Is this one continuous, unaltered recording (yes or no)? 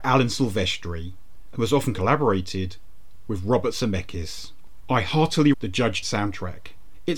no